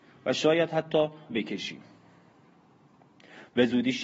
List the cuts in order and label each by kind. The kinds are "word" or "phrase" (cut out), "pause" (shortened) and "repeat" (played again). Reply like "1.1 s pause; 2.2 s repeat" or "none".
1.3 s word